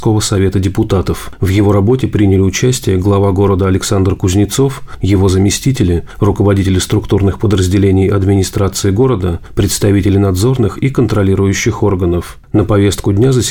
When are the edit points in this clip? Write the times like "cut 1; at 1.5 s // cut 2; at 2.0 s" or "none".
none